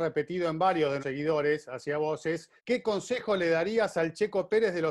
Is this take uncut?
no; 2 cuts; at 1.0 s, 2.6 s

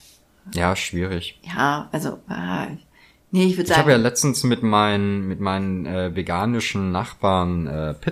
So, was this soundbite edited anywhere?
no; 0 cuts

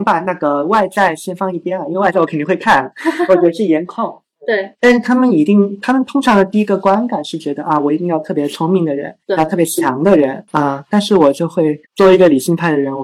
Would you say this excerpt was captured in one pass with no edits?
no; 2 cuts; at 9.2 s, 11.8 s

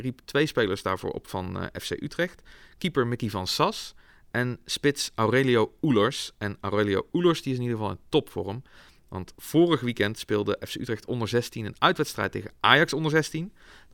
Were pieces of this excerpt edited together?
no; 0 cuts

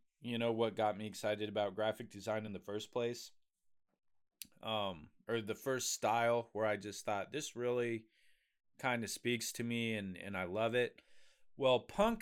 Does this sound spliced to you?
no; 0 cuts

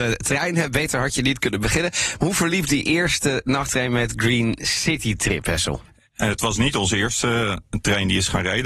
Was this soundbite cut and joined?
no; 0 cuts

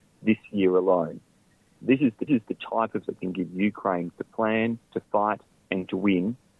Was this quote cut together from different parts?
yes; 4 cuts; at 2.3 s, 3.1 s, 4.1 s, 4.8 s

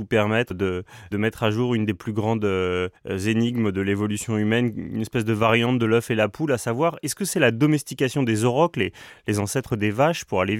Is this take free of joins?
no; 1 cut; at 3.0 s

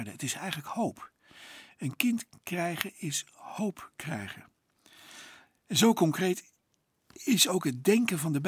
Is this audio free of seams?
yes; 0 cuts

